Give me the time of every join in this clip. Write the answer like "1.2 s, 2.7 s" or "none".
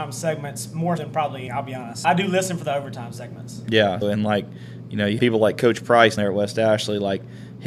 1.0 s, 1.5 s, 2.0 s, 4.0 s, 5.2 s, 6.2 s